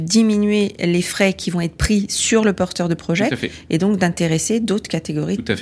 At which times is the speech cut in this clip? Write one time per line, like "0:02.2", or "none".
none